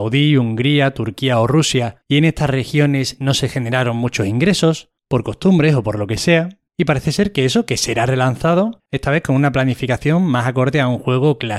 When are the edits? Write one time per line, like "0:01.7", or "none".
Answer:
0:02.0
0:05.0
0:06.7